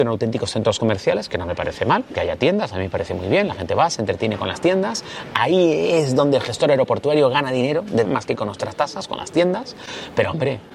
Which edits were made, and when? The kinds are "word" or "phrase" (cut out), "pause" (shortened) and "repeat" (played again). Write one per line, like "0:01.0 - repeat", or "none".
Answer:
0:08.0 - word